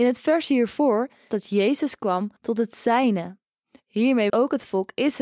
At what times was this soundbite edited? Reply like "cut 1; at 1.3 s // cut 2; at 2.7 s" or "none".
cut 1; at 1.3 s // cut 2; at 2.4 s // cut 3; at 4.3 s